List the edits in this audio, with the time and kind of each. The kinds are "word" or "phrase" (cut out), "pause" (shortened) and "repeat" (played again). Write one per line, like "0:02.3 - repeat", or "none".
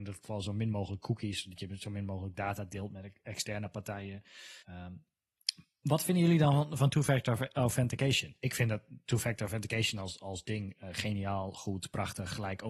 0:04.6 - pause